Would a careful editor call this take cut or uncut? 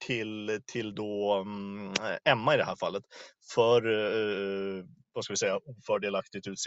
uncut